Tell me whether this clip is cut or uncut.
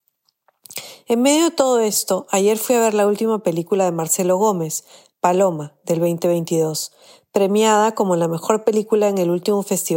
uncut